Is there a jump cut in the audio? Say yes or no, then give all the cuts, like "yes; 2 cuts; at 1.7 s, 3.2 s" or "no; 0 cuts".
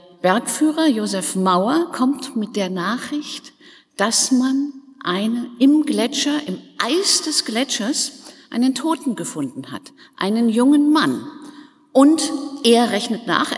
no; 0 cuts